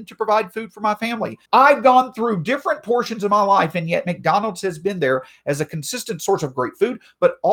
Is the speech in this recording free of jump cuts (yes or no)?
no